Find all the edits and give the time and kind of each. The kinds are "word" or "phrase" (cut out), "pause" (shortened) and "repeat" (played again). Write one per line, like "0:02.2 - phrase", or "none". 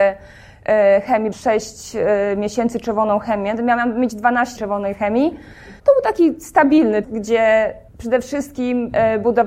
0:01.3 - word
0:04.6 - word
0:05.8 - pause
0:07.0 - word
0:07.9 - pause